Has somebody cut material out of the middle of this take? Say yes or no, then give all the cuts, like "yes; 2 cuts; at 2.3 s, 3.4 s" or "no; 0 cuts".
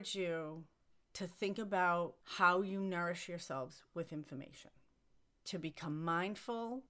no; 0 cuts